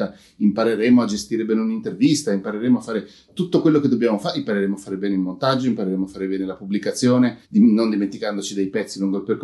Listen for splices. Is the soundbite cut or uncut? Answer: cut